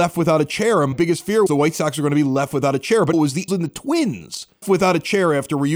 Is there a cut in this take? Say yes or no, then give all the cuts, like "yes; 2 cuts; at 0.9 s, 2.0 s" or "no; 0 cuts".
yes; 5 cuts; at 0.9 s, 1.5 s, 3.1 s, 3.5 s, 4.6 s